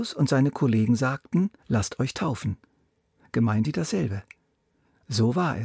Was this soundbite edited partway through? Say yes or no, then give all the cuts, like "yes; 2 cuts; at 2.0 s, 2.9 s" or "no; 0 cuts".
yes; 2 cuts; at 1.6 s, 3.6 s